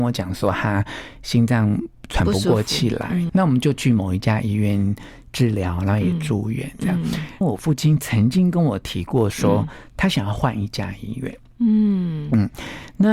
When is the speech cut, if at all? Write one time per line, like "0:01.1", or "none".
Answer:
0:03.3
0:07.4